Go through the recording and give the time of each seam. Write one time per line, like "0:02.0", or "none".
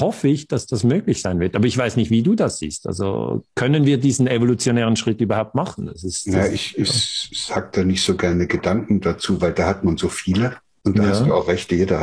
none